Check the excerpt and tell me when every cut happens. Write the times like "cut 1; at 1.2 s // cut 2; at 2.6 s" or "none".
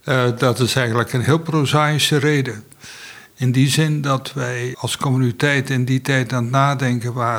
cut 1; at 4.7 s